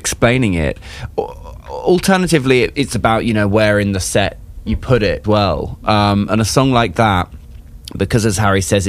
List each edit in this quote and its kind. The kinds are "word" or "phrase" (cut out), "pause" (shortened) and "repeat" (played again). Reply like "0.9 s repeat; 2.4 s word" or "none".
2.7 s word; 5.2 s word